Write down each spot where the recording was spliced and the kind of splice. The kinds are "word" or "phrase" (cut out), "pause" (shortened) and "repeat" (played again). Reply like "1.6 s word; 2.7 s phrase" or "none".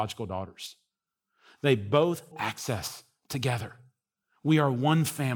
2.3 s phrase